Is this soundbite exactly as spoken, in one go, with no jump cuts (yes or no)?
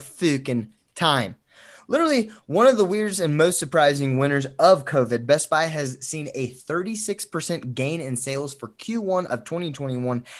yes